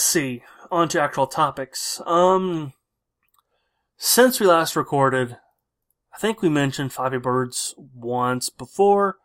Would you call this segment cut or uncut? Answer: uncut